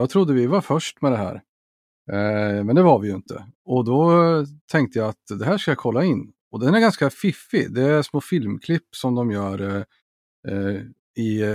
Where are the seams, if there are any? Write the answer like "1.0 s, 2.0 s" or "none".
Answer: 4.6 s